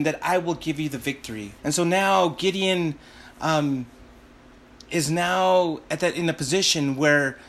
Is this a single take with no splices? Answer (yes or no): no